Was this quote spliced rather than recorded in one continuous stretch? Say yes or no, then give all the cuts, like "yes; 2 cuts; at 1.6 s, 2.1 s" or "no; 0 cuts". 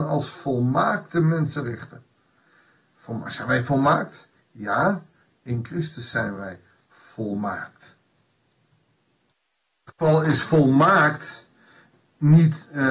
no; 0 cuts